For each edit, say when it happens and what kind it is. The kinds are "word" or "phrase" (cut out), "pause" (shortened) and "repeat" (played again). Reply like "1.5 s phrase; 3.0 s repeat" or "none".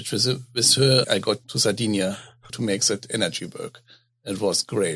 1.0 s word; 1.4 s word; 2.5 s word